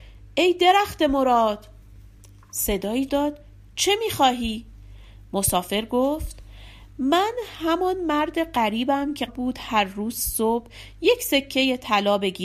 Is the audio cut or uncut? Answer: cut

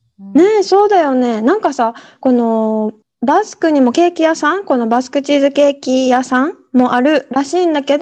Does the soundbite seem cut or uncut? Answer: cut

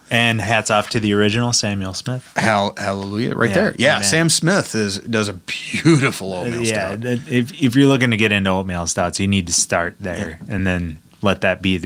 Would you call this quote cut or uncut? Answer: uncut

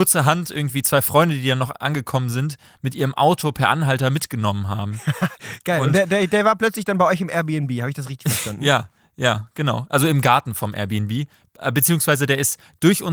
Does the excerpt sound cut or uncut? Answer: uncut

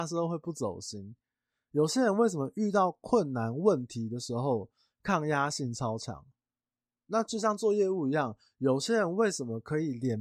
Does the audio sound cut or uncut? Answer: uncut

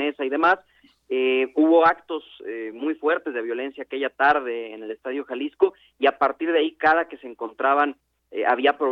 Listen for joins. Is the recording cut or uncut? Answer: uncut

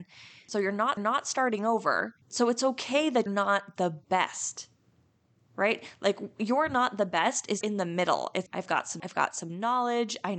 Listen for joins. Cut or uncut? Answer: cut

